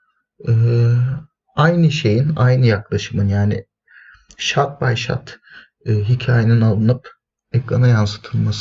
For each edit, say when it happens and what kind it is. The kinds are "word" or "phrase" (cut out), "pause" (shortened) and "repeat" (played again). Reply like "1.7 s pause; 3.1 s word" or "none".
none